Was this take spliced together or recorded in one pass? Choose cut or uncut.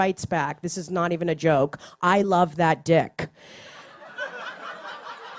uncut